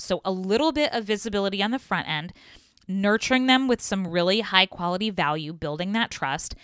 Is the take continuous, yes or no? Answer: yes